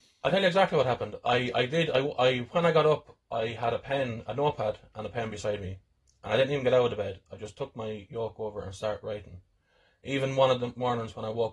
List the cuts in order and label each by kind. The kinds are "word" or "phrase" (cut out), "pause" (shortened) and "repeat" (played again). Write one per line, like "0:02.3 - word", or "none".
none